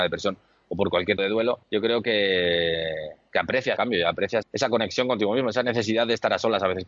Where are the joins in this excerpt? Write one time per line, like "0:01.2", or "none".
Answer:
0:01.2
0:01.6
0:03.8
0:04.4